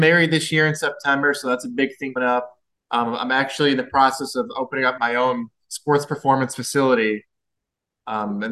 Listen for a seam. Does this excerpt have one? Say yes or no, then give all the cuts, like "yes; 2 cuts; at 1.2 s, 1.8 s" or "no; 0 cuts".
yes; 3 cuts; at 2.2 s, 2.8 s, 5.0 s